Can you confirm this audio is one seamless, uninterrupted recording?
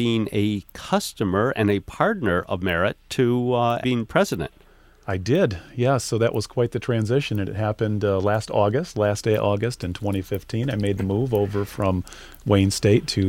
no; 1 cut; at 3.8 s

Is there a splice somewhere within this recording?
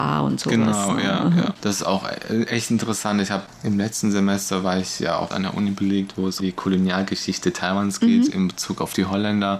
yes; 2 cuts; at 5.3 s, 6.4 s

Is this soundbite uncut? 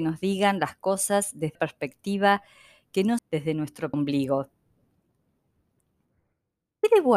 no; 3 cuts; at 1.5 s, 3.2 s, 3.9 s

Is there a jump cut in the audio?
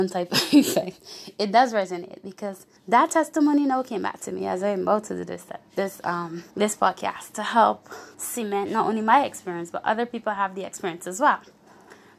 yes; 3 cuts; at 2.8 s, 6.5 s, 8.1 s

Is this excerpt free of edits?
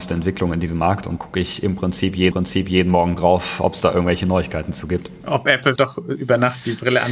no; 3 cuts; at 1.2 s, 2.3 s, 5.8 s

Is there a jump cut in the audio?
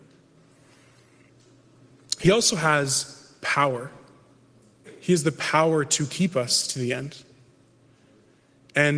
no; 0 cuts

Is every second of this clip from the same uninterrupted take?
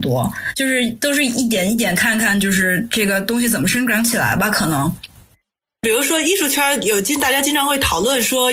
yes; 0 cuts

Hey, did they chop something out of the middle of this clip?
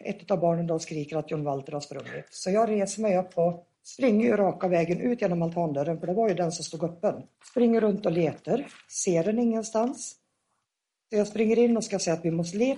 yes; 2 cuts; at 3.7 s, 7.3 s

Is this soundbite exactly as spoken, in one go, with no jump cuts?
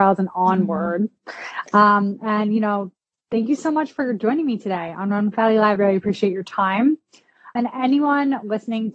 no; 2 cuts; at 5.8 s, 7.6 s

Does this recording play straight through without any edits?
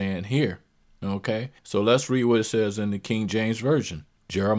no; 1 cut; at 1.6 s

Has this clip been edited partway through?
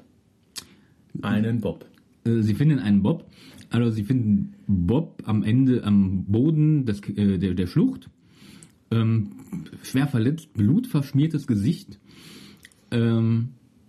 no; 0 cuts

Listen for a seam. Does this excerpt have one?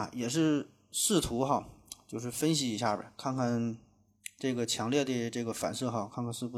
no; 0 cuts

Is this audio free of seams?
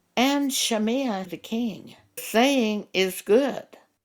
no; 2 cuts; at 1.2 s, 2.2 s

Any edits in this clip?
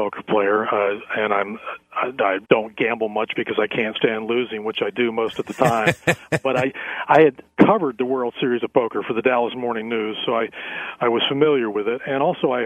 yes; 1 cut; at 2.4 s

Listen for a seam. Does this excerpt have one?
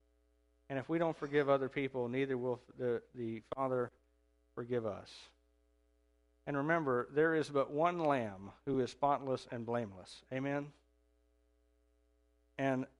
no; 0 cuts

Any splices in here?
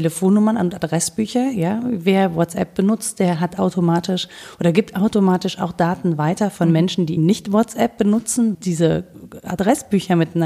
yes; 2 cuts; at 7.2 s, 8.5 s

